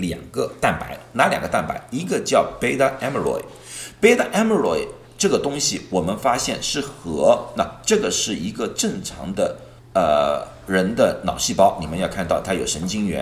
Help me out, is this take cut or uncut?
cut